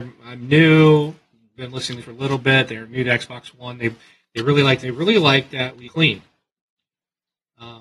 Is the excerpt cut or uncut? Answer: cut